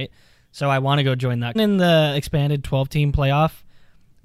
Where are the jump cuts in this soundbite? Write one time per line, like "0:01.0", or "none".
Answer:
0:01.6